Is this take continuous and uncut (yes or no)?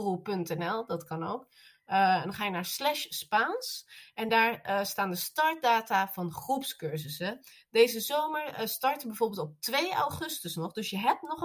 yes